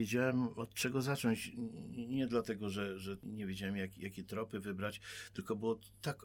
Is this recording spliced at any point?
no; 0 cuts

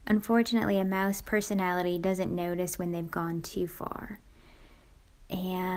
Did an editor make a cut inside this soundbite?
no; 0 cuts

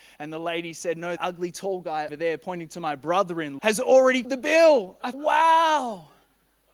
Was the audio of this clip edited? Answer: yes; 5 cuts; at 1.2 s, 2.1 s, 3.6 s, 4.2 s, 5.1 s

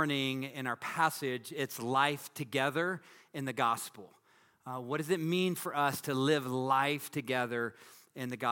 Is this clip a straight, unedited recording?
yes; 0 cuts

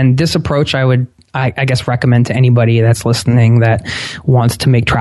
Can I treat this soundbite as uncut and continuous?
yes; 0 cuts

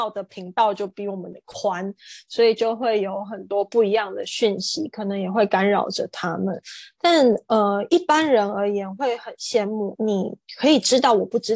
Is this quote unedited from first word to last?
no; 1 cut; at 10.0 s

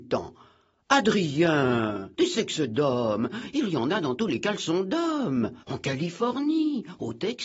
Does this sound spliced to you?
yes; 2 cuts; at 2.1 s, 5.6 s

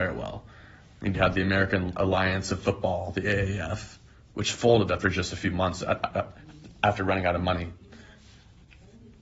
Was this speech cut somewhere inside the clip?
yes; 1 cut; at 1.1 s

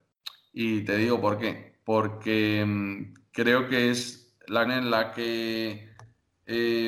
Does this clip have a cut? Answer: yes; 1 cut; at 4.7 s

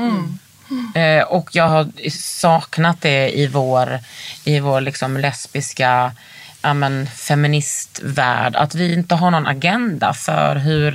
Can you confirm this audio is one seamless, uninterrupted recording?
yes; 0 cuts

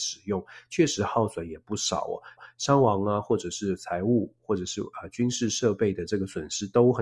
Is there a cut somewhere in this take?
yes; 1 cut; at 2.4 s

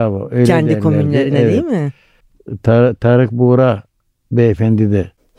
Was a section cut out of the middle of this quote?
no; 0 cuts

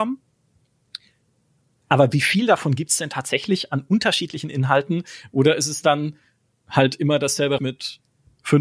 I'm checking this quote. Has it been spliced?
yes; 1 cut; at 7.6 s

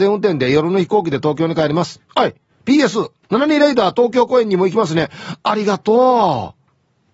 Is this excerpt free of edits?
no; 2 cuts; at 2.1 s, 2.5 s

